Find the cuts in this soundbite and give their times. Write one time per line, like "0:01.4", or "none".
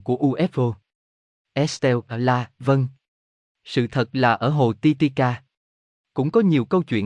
none